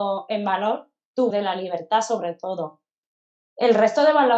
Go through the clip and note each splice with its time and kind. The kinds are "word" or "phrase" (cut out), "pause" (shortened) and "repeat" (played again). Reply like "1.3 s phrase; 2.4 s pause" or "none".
1.3 s word